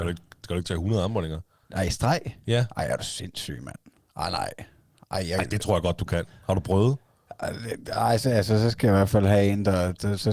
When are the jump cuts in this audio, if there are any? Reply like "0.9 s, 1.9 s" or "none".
none